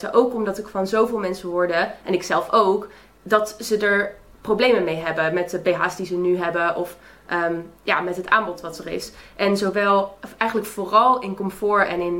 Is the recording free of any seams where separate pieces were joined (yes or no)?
yes